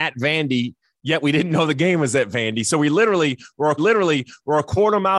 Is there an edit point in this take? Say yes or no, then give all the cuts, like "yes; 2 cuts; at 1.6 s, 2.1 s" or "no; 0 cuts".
yes; 1 cut; at 3.8 s